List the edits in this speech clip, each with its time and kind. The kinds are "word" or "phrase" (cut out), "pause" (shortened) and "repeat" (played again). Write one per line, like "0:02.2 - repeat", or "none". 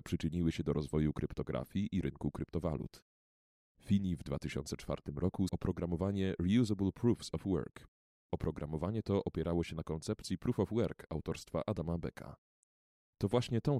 0:05.5 - word